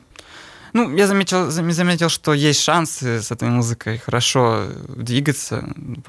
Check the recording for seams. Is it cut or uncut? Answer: uncut